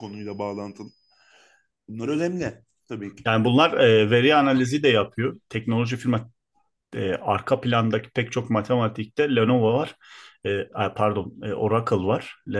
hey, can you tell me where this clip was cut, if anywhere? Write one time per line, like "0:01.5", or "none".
none